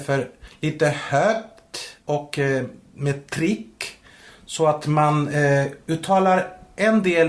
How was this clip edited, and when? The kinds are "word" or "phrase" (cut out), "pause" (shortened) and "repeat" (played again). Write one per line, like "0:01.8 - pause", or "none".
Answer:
0:02.0 - pause